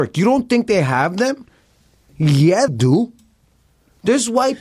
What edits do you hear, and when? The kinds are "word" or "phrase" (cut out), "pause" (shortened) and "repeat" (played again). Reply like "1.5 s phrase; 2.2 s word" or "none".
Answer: 2.7 s word